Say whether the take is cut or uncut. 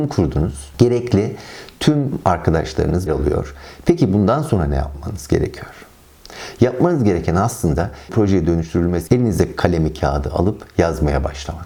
cut